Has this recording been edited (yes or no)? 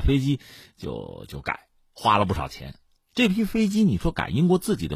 no